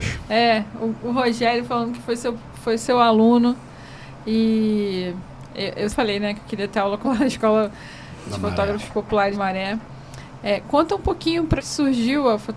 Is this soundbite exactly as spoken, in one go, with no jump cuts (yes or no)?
no